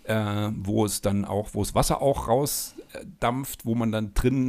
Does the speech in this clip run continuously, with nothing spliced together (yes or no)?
yes